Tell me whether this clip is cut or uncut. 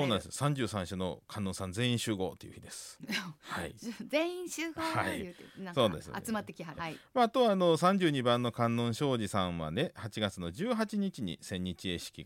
cut